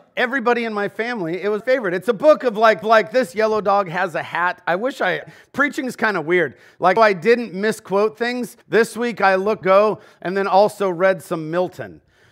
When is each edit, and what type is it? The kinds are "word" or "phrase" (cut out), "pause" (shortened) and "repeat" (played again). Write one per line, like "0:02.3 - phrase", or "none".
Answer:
0:01.6 - word
0:02.8 - repeat
0:05.2 - phrase
0:07.0 - word
0:08.6 - pause
0:09.6 - phrase